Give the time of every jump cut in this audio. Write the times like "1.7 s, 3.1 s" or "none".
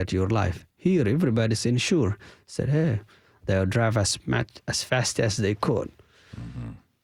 none